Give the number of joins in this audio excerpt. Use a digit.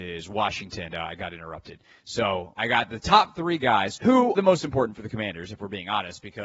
3